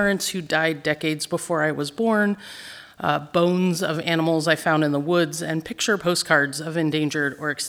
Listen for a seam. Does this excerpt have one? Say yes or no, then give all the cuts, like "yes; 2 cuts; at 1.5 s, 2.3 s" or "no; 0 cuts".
no; 0 cuts